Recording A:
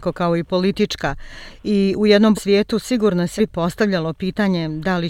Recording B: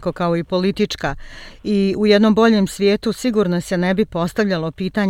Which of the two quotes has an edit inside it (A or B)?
A